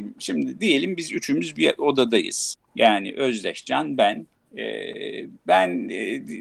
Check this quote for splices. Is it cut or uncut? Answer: cut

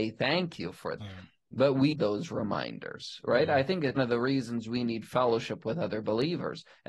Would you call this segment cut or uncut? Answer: cut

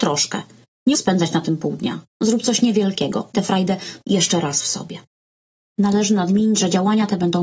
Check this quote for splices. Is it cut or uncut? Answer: cut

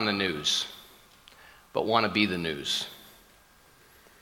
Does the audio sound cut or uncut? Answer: uncut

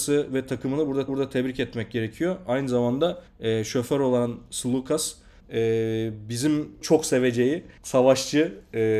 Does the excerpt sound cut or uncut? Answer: cut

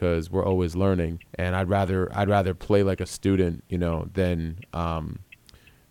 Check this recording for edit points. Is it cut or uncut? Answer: cut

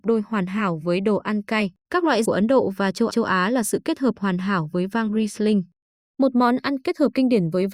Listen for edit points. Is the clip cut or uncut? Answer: cut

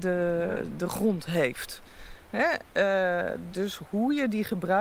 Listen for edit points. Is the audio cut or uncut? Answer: uncut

